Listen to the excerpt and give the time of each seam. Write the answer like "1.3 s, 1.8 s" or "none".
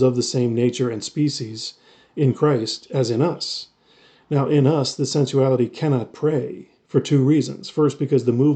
none